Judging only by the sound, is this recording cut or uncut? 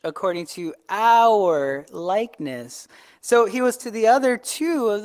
cut